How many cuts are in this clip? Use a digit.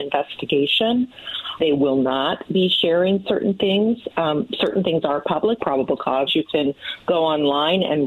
3